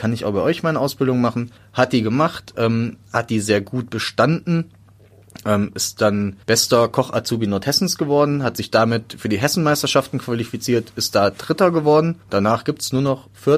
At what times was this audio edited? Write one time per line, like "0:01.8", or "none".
0:01.6
0:06.4
0:12.2